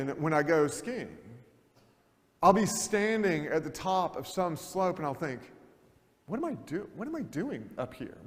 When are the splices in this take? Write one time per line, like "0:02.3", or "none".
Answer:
none

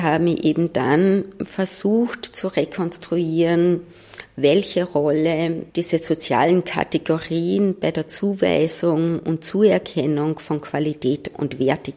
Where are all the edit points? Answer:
0:05.7

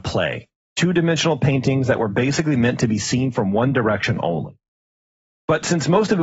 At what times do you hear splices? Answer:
none

